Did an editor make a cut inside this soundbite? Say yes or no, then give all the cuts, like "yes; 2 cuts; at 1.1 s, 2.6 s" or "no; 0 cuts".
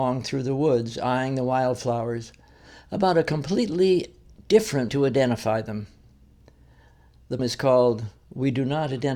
yes; 2 cuts; at 4.9 s, 7.4 s